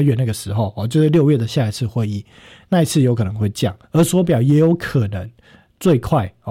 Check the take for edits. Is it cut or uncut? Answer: cut